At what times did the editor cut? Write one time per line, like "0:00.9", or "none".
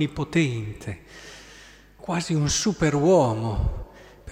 none

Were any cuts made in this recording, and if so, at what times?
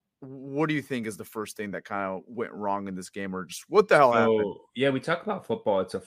none

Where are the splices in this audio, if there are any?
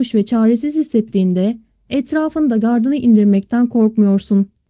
none

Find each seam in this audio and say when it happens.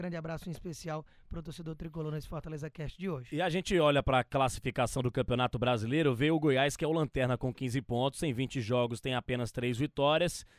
none

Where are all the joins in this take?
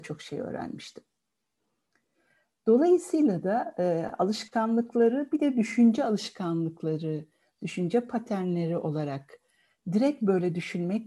none

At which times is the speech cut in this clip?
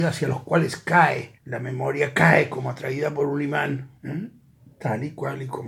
0:01.4
0:04.0

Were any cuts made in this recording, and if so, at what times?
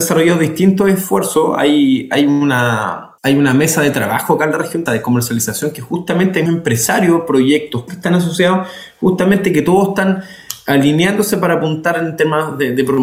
0:03.2
0:04.9
0:06.5
0:07.9

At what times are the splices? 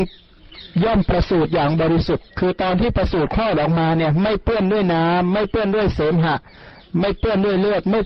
0:02.3

